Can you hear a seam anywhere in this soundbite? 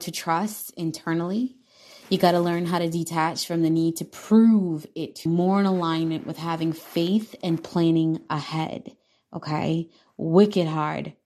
yes; 1 cut; at 5.3 s

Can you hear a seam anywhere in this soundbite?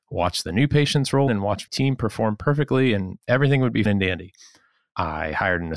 yes; 3 cuts; at 1.3 s, 1.7 s, 3.9 s

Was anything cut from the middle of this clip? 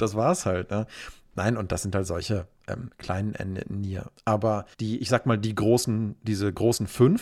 yes; 1 cut; at 4.7 s

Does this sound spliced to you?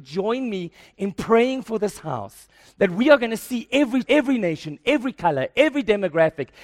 yes; 1 cut; at 4.0 s

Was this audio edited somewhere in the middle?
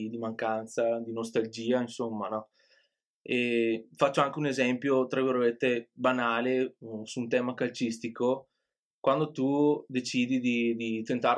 no; 0 cuts

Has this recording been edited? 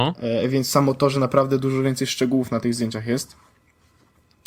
no; 0 cuts

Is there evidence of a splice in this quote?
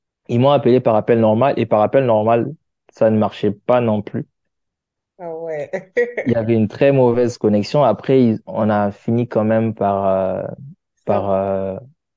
no; 0 cuts

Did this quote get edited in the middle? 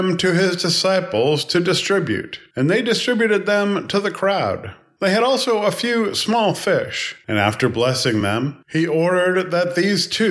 no; 0 cuts

